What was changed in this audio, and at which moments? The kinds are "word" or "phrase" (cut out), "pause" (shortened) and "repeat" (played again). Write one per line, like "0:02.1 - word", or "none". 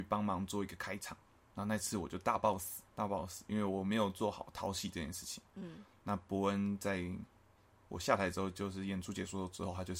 0:01.4 - word
0:02.9 - word

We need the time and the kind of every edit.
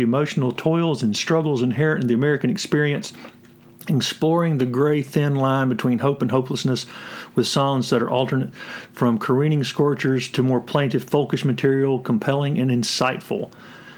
none

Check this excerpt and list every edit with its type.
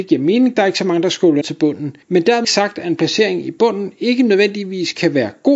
0:01.4 - word
0:02.0 - pause
0:02.4 - word

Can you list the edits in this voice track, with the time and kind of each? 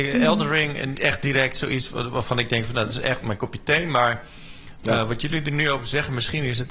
0:00.9 - word
0:03.2 - word

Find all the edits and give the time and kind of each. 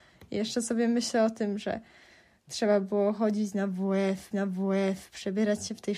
0:04.3 - repeat

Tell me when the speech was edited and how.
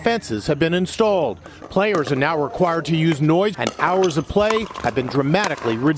0:03.5 - phrase

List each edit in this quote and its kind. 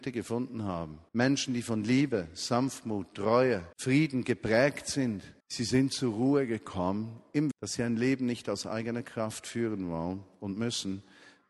0:01.1 - pause
0:03.7 - pause
0:05.4 - pause
0:07.5 - word

